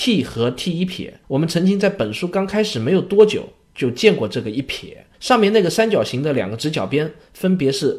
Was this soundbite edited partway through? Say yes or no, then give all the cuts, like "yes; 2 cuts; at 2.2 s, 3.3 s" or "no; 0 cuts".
yes; 2 cuts; at 1.2 s, 5.1 s